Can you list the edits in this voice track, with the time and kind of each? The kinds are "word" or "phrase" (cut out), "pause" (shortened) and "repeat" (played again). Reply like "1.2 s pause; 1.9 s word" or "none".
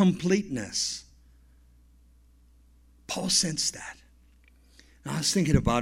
none